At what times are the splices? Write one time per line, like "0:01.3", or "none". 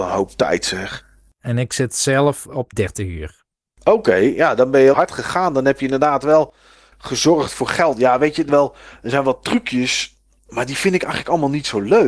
0:02.7
0:04.9
0:08.5